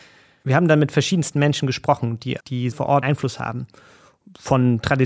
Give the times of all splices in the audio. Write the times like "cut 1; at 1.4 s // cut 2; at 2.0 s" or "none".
cut 1; at 2.4 s // cut 2; at 2.7 s // cut 3; at 3.0 s

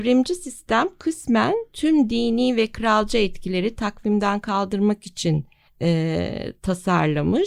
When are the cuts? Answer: cut 1; at 5.7 s

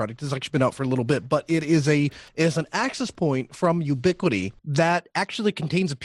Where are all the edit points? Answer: cut 1; at 2.3 s // cut 2; at 4.6 s

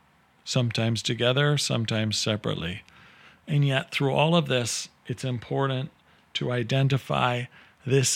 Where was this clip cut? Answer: none

